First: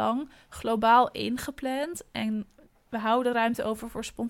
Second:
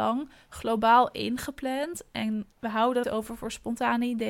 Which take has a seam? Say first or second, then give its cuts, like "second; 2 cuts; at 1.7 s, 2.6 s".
second; 2 cuts; at 2.5 s, 3.0 s